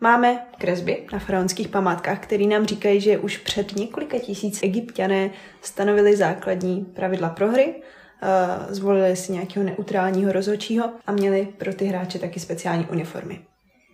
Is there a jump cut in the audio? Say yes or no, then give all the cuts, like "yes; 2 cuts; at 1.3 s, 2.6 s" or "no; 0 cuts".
yes; 2 cuts; at 4.6 s, 11.0 s